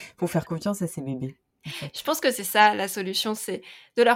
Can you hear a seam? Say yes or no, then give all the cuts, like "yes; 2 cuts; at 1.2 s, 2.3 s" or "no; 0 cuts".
no; 0 cuts